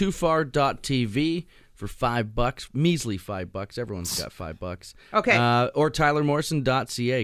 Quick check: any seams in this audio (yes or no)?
no